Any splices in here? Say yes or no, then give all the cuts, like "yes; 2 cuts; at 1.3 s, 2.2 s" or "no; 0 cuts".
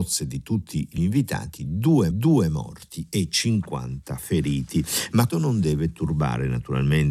yes; 3 cuts; at 1.0 s, 2.1 s, 5.3 s